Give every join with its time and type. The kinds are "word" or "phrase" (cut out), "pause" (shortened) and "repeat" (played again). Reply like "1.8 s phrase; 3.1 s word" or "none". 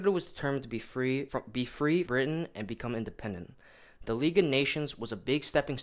1.3 s word; 2.0 s word